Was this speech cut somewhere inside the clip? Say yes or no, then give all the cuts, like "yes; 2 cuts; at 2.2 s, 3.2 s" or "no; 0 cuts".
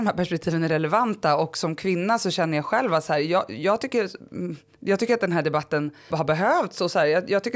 yes; 1 cut; at 6.1 s